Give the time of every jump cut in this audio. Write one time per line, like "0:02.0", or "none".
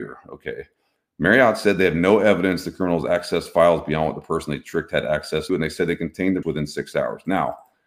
0:05.5
0:06.4